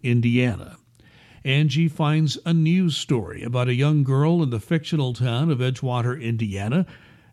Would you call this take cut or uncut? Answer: uncut